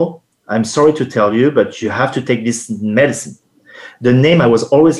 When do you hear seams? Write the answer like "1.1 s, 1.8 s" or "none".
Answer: none